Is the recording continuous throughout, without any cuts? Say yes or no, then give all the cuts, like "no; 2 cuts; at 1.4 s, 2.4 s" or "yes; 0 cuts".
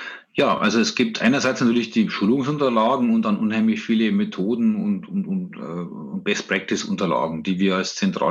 yes; 0 cuts